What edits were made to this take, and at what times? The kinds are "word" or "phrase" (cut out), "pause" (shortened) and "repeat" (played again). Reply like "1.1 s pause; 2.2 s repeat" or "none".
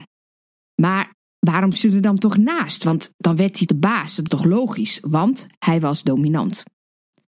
1.7 s word; 3.7 s word; 4.3 s word